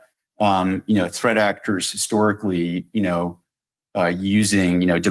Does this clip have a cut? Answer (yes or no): no